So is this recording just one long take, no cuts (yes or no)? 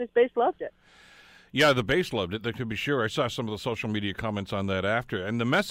yes